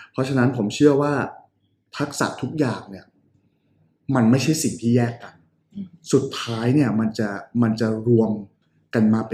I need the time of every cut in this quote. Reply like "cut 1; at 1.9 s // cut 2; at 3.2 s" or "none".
none